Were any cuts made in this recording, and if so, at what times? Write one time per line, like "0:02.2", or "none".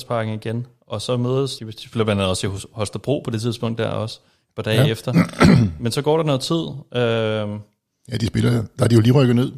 0:01.6